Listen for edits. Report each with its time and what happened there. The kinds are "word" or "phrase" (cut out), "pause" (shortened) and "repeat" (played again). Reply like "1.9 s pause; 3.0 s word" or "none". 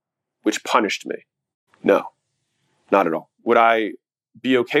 1.7 s pause; 3.4 s pause